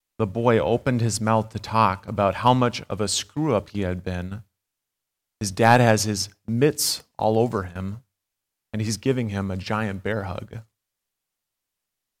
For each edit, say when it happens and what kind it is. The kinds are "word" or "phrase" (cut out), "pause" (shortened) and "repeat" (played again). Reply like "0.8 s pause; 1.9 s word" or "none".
none

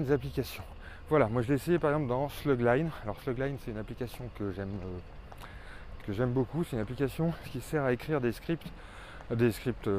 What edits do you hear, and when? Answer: 6.0 s word

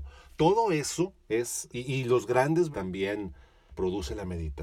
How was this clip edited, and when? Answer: 1.7 s word; 2.7 s word; 3.7 s word

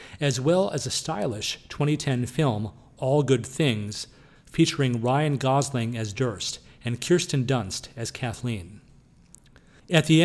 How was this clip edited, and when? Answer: none

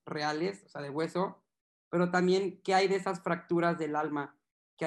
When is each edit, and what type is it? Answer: none

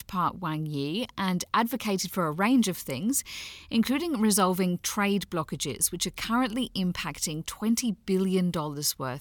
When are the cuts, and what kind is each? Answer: none

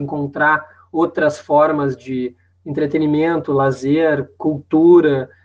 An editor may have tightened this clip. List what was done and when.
none

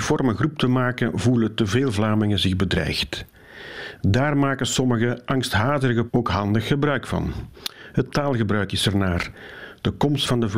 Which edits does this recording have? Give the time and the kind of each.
6.1 s word

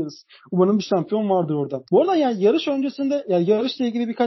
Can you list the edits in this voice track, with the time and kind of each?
1.9 s pause

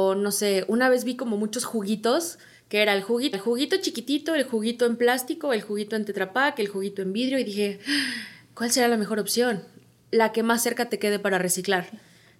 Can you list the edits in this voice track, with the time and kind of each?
3.3 s repeat

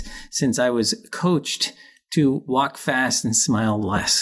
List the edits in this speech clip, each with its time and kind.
none

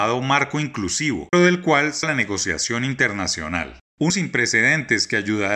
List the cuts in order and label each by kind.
1.3 s word; 2.0 s word; 4.1 s word

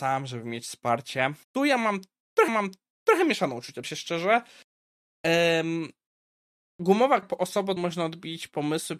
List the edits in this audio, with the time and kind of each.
1.4 s pause; 2.5 s repeat; 3.8 s word; 7.2 s word; 7.8 s word

